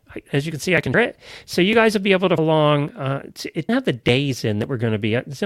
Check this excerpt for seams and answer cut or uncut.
cut